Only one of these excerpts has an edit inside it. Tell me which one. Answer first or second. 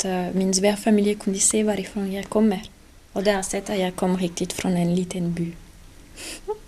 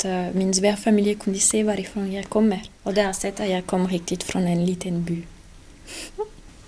second